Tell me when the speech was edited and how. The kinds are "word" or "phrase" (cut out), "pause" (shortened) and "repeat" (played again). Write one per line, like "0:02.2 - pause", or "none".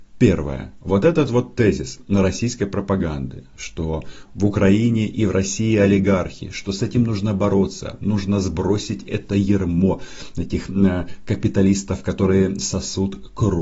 none